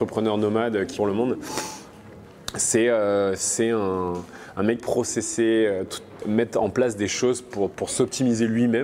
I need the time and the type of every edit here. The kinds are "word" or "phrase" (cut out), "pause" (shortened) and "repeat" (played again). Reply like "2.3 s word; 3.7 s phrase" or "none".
1.0 s word; 4.8 s phrase; 6.2 s word